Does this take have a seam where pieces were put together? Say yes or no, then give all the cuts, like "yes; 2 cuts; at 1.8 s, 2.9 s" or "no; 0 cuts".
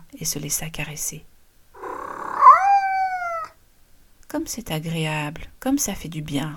no; 0 cuts